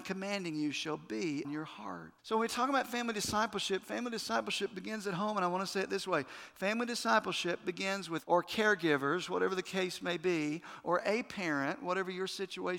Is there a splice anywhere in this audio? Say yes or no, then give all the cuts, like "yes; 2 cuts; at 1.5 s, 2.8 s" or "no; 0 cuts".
yes; 3 cuts; at 1.4 s, 2.2 s, 8.2 s